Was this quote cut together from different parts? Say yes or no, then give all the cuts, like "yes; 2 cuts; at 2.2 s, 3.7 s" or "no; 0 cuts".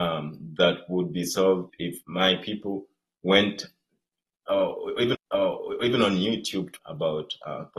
yes; 4 cuts; at 1.7 s, 2.0 s, 5.1 s, 6.8 s